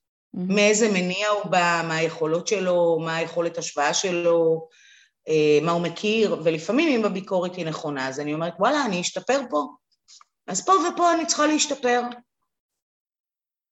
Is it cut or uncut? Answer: uncut